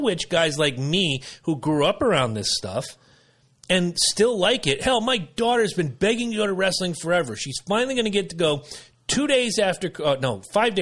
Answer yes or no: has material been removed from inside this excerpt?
no